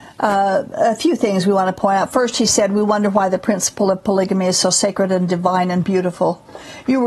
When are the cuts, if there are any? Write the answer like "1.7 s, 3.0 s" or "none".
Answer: none